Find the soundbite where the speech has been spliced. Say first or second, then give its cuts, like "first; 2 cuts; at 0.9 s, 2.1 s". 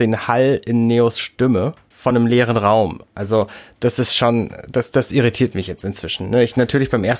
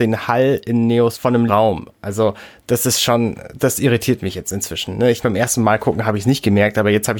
second; 4 cuts; at 1.1 s, 1.5 s, 3.6 s, 5.2 s